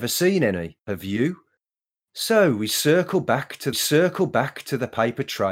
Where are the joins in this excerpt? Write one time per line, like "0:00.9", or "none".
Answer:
0:03.7